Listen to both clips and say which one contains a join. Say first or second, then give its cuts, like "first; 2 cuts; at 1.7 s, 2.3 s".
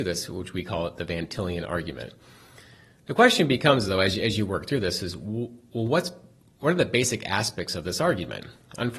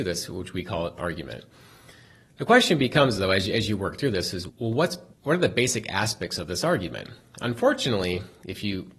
second; 3 cuts; at 1.0 s, 4.5 s, 5.1 s